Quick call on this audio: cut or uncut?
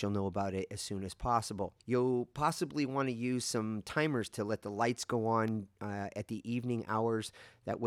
cut